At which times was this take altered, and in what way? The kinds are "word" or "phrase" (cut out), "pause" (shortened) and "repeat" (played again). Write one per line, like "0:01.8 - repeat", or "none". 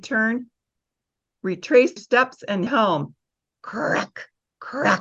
0:02.0 - word
0:02.7 - word